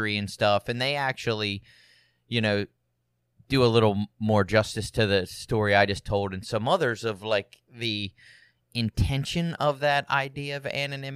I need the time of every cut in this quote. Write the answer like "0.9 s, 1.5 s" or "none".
none